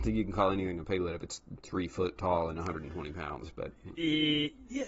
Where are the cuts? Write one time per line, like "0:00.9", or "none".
none